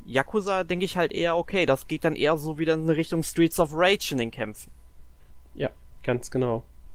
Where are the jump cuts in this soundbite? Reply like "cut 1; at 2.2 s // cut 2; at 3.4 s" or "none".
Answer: none